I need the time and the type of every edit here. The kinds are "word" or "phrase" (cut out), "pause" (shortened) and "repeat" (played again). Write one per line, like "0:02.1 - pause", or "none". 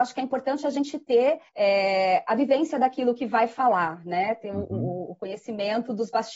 0:01.5 - pause